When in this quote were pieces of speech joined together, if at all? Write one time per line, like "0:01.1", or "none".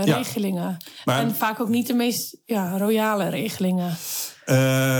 none